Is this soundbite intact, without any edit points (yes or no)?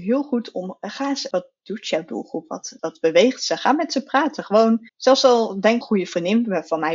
no